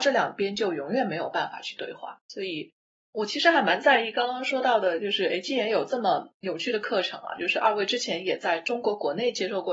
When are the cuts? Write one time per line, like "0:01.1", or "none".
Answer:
0:02.2